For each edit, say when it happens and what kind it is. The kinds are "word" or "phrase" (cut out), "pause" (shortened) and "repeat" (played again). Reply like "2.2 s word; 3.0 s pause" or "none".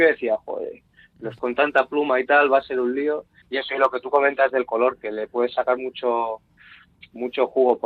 1.4 s word; 3.4 s word